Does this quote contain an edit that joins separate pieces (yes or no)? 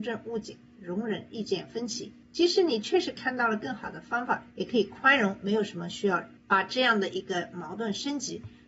yes